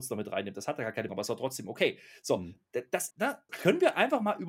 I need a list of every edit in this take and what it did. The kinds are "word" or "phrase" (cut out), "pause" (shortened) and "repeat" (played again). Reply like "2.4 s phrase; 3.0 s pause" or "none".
1.1 s word; 3.1 s word; 3.5 s word